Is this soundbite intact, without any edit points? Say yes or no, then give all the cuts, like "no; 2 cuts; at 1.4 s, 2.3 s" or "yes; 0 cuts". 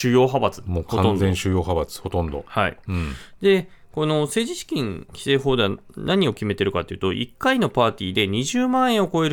yes; 0 cuts